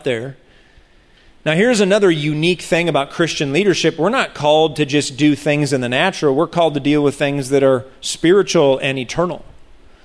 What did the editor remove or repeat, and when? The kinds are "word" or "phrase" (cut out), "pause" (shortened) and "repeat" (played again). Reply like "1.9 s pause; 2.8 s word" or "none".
none